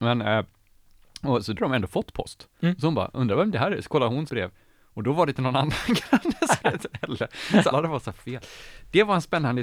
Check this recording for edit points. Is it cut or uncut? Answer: cut